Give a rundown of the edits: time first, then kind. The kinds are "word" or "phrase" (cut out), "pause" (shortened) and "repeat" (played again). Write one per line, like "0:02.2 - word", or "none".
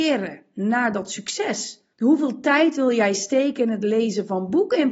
0:01.9 - pause